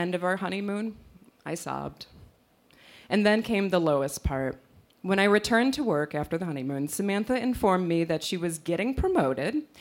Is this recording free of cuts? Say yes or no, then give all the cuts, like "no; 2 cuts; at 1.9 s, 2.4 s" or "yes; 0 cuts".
yes; 0 cuts